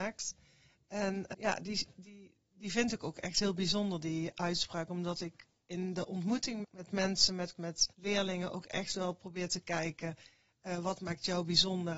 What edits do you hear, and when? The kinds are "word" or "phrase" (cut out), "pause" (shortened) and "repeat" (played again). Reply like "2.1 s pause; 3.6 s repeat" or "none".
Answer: 1.3 s word; 6.6 s word; 7.6 s word; 7.9 s pause